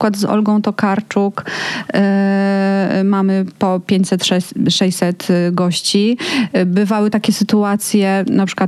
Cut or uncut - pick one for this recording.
uncut